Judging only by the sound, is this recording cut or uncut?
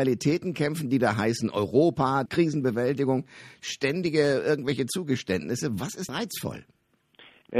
cut